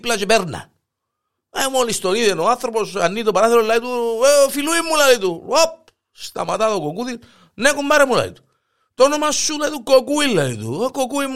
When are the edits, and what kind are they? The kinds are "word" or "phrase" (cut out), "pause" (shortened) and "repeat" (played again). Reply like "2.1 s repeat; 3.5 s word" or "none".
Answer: none